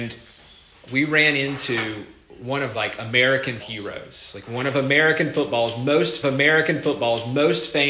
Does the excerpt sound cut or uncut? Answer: cut